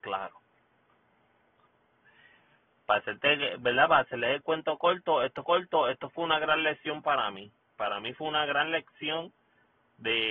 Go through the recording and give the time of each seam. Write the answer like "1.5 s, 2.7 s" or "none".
5.4 s